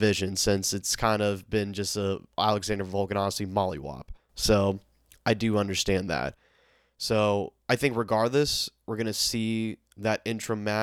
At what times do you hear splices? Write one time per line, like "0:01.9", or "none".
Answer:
none